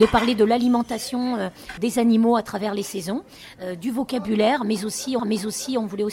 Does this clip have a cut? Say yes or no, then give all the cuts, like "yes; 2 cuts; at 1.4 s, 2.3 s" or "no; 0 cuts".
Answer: yes; 2 cuts; at 1.8 s, 5.2 s